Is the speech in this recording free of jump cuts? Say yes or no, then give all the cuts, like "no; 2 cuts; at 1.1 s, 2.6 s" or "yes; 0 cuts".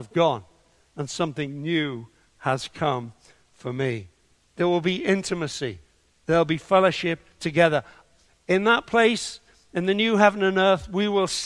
yes; 0 cuts